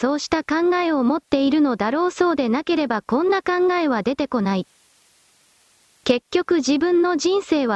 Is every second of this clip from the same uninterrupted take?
yes; 0 cuts

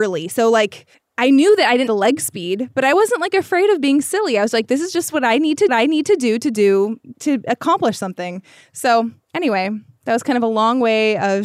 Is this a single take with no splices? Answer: no; 4 cuts; at 0.9 s, 1.9 s, 5.7 s, 7.1 s

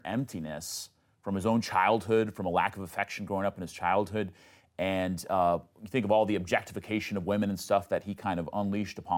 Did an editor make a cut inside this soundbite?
no; 0 cuts

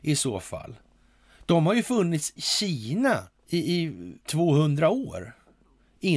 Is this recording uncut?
no; 3 cuts; at 2.4 s, 3.4 s, 4.2 s

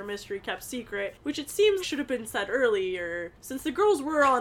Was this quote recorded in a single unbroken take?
no; 1 cut; at 1.8 s

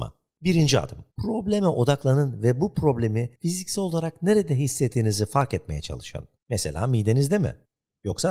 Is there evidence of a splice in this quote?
yes; 3 cuts; at 1.1 s, 3.4 s, 6.4 s

